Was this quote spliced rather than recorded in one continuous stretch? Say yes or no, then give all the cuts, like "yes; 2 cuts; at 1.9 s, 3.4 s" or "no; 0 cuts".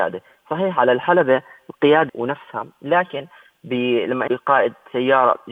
yes; 2 cuts; at 2.1 s, 4.3 s